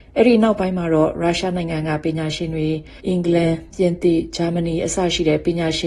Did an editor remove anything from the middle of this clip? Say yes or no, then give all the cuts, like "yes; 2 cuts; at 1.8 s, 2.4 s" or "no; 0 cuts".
yes; 1 cut; at 3.0 s